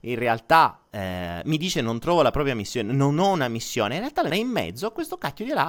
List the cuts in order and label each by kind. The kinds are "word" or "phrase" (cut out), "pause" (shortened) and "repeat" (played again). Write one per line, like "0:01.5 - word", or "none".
0:04.3 - phrase